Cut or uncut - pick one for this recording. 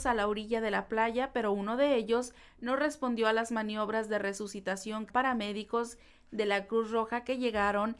cut